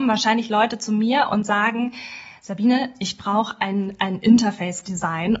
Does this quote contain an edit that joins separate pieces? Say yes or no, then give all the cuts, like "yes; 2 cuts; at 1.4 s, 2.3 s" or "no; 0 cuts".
no; 0 cuts